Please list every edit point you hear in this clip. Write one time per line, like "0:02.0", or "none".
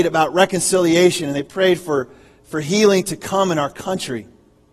none